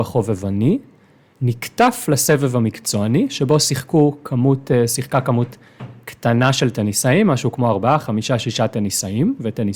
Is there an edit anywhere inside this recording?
no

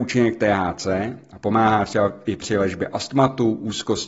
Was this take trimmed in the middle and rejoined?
no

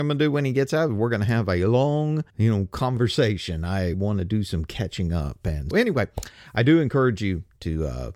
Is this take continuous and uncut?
no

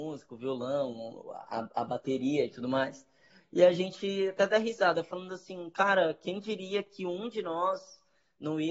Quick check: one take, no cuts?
yes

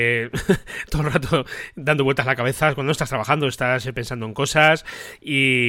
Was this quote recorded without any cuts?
yes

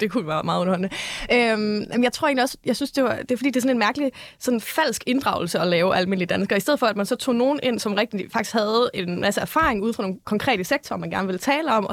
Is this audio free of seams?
yes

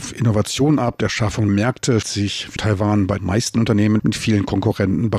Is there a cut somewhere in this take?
yes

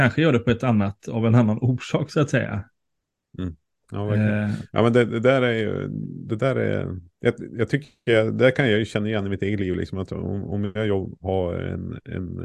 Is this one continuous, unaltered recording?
no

